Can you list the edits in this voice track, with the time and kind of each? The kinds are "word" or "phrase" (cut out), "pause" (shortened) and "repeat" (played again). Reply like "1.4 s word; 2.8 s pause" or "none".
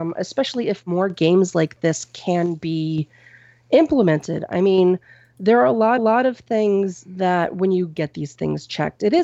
6.0 s repeat; 8.0 s phrase